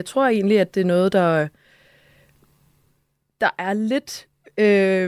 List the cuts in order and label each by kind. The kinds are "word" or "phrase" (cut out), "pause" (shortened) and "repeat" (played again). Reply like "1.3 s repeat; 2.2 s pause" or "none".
none